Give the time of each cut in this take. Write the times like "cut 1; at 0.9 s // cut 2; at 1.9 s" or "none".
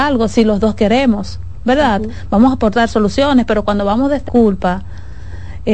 cut 1; at 4.3 s